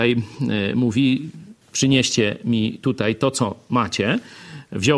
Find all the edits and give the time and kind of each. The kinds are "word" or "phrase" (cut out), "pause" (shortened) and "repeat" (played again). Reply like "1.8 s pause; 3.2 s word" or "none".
1.6 s pause